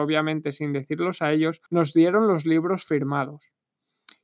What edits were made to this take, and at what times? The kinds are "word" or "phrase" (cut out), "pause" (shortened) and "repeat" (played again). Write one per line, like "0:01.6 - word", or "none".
0:01.7 - pause